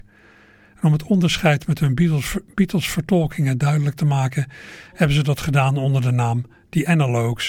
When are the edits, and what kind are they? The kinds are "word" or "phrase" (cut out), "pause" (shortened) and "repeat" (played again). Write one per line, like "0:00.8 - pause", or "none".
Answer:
none